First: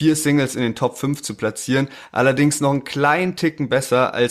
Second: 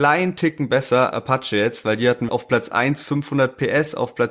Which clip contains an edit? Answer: second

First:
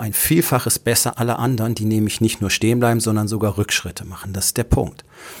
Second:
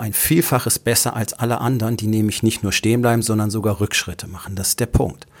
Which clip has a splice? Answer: first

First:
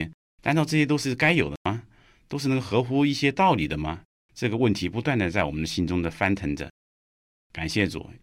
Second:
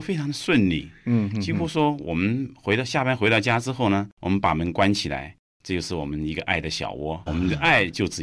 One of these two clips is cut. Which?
second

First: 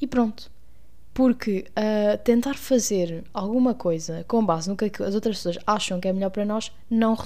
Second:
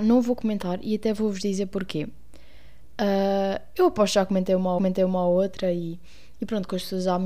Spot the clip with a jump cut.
second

